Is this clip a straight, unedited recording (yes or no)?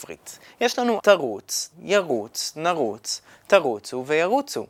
no